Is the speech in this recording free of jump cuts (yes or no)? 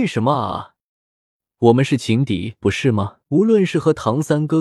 no